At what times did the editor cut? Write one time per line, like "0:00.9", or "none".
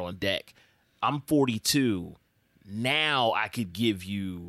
none